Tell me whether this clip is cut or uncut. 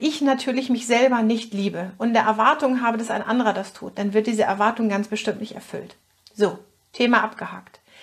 uncut